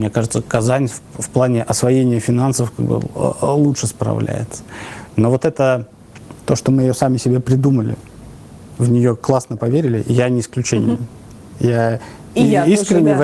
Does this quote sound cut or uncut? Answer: uncut